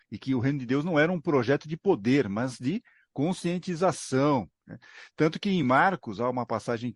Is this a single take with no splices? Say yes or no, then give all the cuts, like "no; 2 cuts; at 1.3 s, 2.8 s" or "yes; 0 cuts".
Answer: yes; 0 cuts